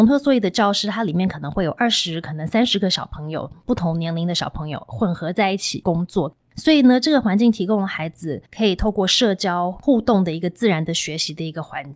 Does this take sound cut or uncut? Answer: cut